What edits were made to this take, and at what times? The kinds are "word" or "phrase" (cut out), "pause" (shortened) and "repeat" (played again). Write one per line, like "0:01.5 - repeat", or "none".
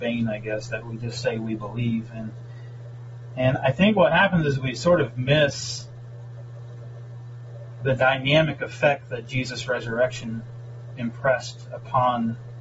none